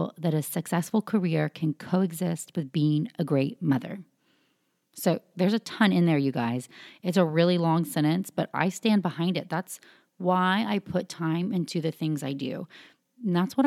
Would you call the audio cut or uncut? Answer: uncut